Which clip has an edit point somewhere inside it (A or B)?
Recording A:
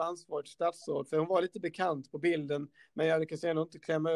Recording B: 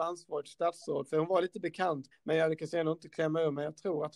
B